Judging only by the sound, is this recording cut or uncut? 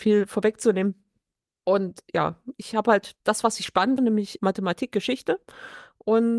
cut